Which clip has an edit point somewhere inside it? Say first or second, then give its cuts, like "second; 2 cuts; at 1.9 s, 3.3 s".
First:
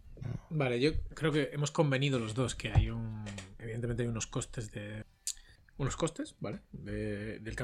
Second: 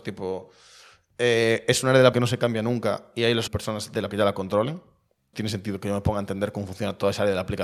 second; 4 cuts; at 2.1 s, 3.5 s, 4.1 s, 5.3 s